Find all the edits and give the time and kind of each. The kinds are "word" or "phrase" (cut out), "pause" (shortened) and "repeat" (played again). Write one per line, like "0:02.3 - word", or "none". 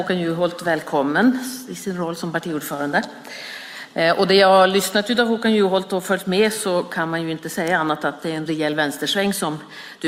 none